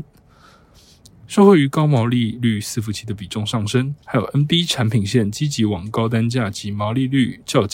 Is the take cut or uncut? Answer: cut